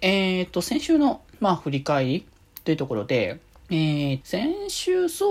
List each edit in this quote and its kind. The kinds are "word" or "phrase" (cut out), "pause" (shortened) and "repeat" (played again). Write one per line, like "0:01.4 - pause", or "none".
0:01.3 - pause
0:03.6 - pause
0:04.2 - word